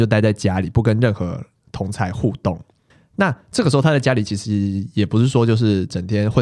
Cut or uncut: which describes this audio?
cut